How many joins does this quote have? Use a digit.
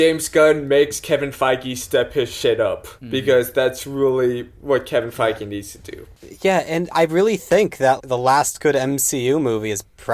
2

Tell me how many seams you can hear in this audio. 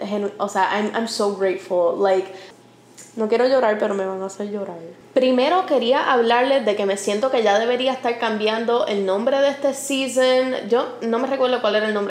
0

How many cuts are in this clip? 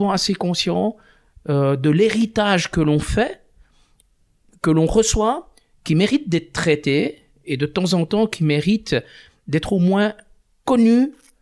0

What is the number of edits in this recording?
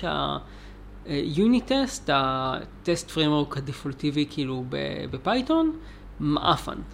0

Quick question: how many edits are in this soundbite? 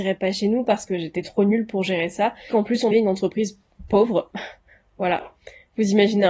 2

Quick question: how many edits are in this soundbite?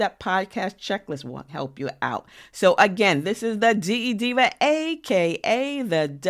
1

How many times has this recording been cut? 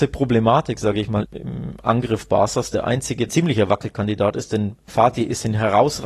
2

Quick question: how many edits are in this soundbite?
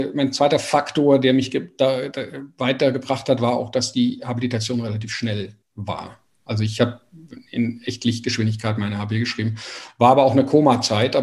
1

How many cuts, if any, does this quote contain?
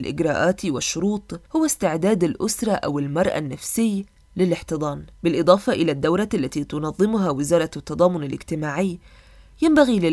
2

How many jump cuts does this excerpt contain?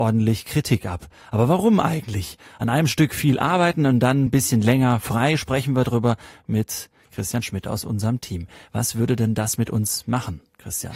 0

